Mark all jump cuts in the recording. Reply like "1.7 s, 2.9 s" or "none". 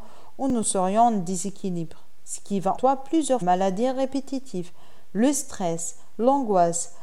2.8 s, 3.4 s